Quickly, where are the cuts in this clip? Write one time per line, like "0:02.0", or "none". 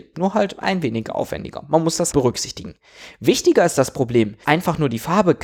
0:02.1
0:04.4